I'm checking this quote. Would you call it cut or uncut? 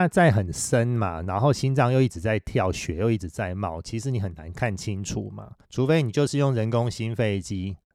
cut